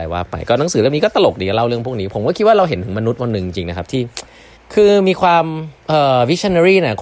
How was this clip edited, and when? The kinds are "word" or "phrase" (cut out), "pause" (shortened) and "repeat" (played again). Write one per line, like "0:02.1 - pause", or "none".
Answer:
0:04.6 - pause
0:05.8 - pause

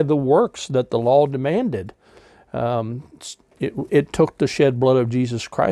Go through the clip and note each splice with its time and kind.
0:03.9 - word

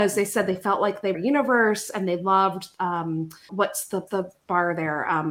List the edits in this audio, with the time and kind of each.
0:01.1 - phrase
0:03.5 - word
0:04.1 - word

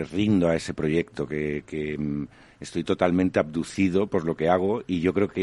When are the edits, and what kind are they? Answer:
none

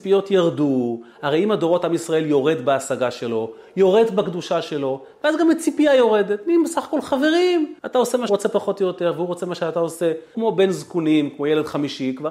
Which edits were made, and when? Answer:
0:07.8 - pause
0:08.3 - word
0:10.3 - word

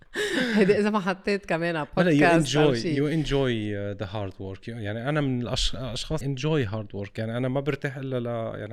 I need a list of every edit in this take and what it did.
0:06.2 - word

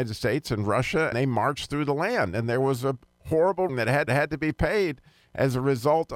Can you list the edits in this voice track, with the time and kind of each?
0:01.1 - word
0:03.7 - word
0:04.1 - repeat

